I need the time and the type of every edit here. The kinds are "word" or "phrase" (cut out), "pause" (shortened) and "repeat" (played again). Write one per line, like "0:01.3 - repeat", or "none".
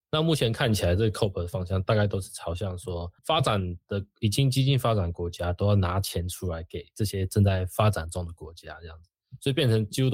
0:03.2 - pause